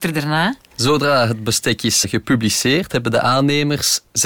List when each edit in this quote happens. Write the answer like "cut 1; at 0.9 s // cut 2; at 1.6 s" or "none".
cut 1; at 2.0 s